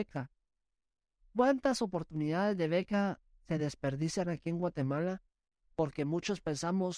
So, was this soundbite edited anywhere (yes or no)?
no